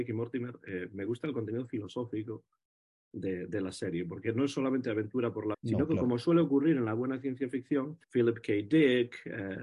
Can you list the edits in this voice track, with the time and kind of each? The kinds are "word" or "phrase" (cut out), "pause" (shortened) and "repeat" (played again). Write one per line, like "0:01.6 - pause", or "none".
0:05.5 - word
0:08.0 - pause